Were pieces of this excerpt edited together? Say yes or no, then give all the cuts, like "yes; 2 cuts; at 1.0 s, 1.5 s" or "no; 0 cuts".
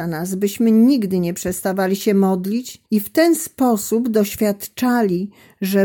yes; 1 cut; at 2.9 s